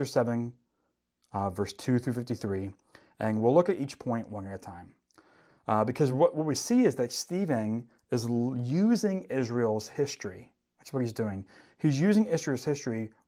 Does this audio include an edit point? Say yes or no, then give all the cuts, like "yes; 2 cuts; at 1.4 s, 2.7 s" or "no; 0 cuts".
no; 0 cuts